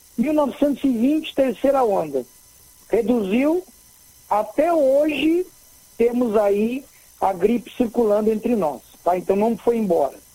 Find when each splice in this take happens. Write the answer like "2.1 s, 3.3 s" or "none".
none